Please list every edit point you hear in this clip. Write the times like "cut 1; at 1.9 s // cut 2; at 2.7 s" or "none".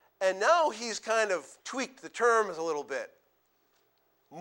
cut 1; at 1.6 s